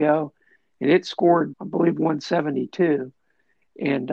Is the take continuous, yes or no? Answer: no